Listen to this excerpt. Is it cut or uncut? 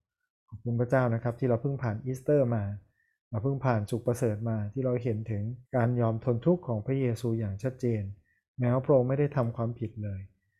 cut